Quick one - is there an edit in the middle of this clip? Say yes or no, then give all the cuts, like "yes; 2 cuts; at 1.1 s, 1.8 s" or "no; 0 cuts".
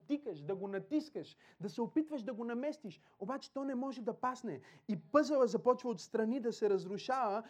no; 0 cuts